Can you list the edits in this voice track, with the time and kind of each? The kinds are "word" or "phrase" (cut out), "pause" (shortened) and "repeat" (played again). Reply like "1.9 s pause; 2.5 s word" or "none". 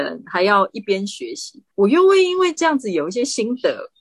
1.7 s pause